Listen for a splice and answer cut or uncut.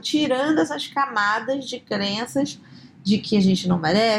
uncut